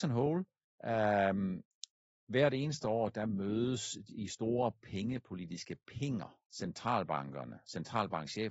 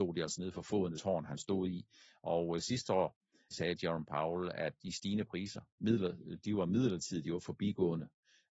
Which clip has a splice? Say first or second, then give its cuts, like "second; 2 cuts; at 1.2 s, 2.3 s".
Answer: second; 3 cuts; at 0.9 s, 3.5 s, 4.8 s